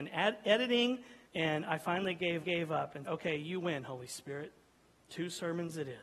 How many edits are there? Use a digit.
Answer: 3